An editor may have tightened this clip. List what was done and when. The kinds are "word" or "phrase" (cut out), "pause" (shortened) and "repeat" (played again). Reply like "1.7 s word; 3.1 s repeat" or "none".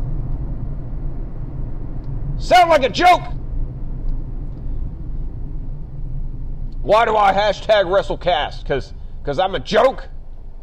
none